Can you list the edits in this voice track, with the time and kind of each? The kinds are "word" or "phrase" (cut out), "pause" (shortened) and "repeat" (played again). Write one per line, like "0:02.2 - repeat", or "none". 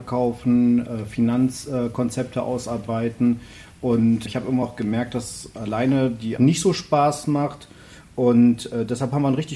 0:04.3 - word
0:04.6 - word
0:06.4 - word